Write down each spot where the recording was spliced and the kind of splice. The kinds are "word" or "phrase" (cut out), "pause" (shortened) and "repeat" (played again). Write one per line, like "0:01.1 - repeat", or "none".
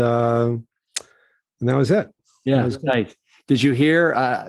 none